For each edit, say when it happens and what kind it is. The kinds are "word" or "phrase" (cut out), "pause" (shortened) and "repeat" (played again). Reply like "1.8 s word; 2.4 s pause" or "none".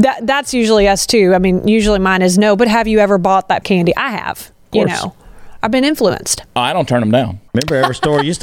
3.6 s word; 7.5 s pause